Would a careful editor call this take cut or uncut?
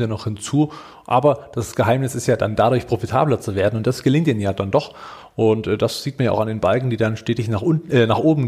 uncut